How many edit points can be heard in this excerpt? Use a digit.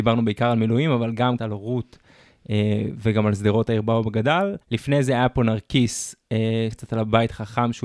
3